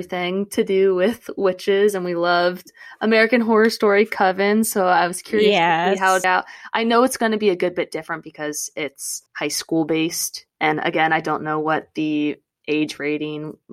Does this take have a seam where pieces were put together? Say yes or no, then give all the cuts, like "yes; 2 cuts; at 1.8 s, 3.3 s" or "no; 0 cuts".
yes; 2 cuts; at 6.2 s, 9.3 s